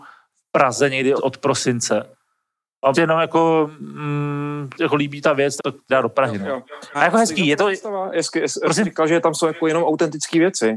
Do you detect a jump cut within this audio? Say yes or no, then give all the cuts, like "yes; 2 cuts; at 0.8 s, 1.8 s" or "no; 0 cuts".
yes; 6 cuts; at 1.2 s, 2.9 s, 4.7 s, 5.6 s, 5.9 s, 6.9 s